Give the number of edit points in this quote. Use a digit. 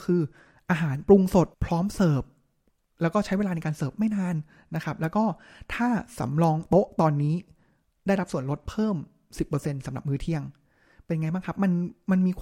1